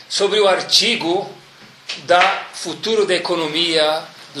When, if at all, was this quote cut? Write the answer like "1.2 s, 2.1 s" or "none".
none